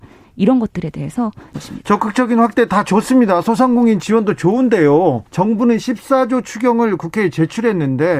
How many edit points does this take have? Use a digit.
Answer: 2